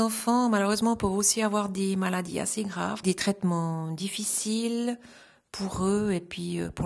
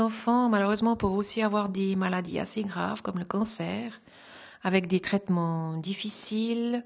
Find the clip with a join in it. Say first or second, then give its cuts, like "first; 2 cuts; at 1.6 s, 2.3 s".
first; 1 cut; at 3.0 s